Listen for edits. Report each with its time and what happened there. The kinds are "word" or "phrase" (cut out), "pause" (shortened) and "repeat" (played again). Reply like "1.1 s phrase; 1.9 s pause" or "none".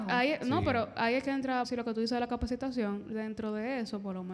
1.6 s phrase; 3.1 s phrase